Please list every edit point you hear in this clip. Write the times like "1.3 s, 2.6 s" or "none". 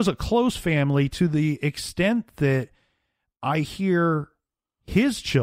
none